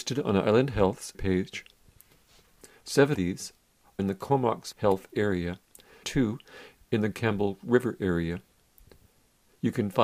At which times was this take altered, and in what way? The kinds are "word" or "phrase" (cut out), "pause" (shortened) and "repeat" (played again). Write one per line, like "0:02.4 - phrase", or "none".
0:01.1 - word
0:03.1 - word
0:04.0 - word
0:04.7 - word
0:06.0 - word
0:07.1 - word

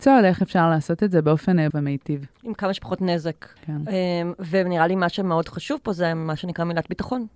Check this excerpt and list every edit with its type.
0:01.7 - word
0:03.6 - pause

